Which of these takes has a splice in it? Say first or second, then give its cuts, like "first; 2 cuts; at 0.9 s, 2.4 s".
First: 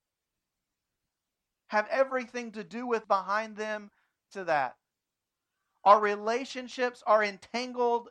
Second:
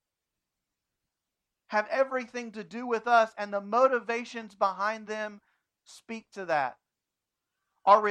first; 2 cuts; at 3.0 s, 4.3 s